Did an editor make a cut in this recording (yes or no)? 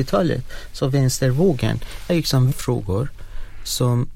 yes